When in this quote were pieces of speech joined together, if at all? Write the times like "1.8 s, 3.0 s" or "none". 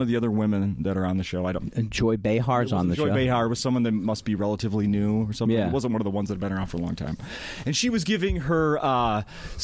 none

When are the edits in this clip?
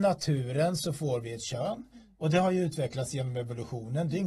none

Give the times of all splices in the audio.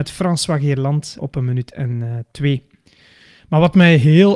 1.2 s

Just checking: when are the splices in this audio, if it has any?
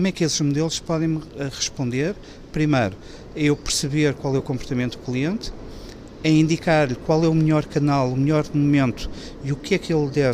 none

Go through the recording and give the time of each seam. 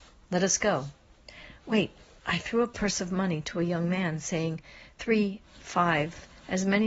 none

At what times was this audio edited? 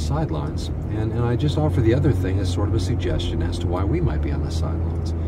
none

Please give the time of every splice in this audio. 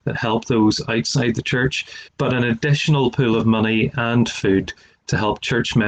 2.1 s

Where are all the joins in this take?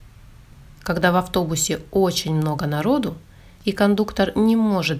none

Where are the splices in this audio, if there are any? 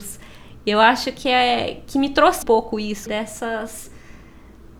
2.4 s, 3.1 s

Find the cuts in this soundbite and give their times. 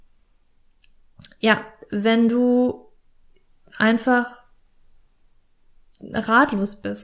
3.2 s

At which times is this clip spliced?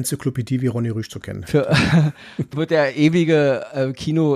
2.5 s

